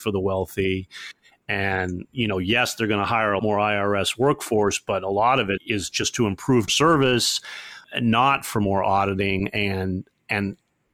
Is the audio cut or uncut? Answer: cut